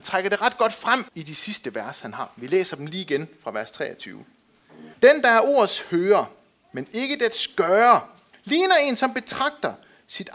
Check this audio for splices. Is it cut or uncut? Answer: cut